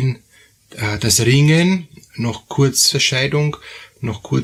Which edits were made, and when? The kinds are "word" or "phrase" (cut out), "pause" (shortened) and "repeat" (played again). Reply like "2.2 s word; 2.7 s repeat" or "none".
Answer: 2.9 s word